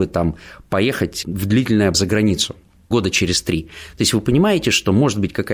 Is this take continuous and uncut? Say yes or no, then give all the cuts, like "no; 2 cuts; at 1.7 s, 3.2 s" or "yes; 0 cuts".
no; 3 cuts; at 1.2 s, 1.9 s, 2.9 s